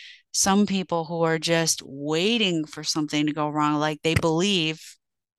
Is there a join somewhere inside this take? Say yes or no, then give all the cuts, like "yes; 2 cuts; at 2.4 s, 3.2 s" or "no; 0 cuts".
no; 0 cuts